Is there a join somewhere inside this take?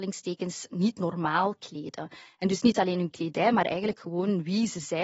no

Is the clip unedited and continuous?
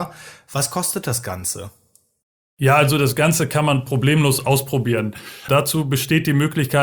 yes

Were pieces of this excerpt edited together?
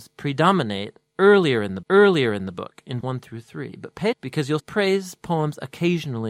yes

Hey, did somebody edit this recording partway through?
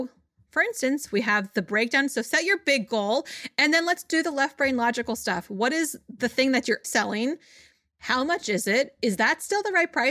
yes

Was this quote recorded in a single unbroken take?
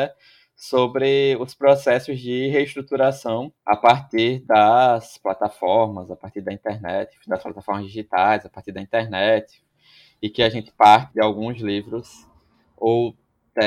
no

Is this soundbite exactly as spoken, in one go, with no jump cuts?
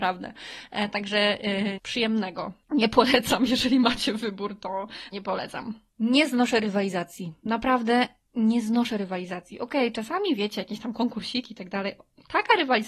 no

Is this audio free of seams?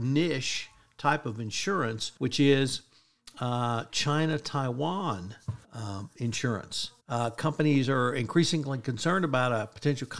no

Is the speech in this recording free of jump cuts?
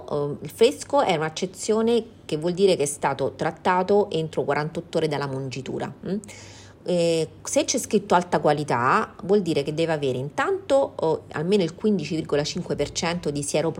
no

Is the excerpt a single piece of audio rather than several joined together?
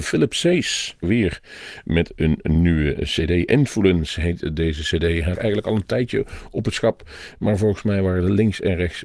no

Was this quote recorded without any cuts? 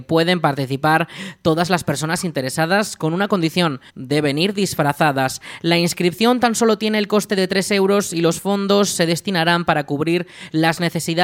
no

